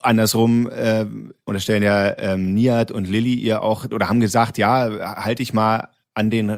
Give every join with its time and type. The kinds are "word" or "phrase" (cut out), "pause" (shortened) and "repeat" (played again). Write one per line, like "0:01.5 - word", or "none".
none